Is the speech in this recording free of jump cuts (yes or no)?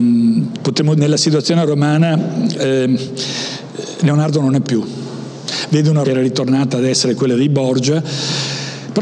no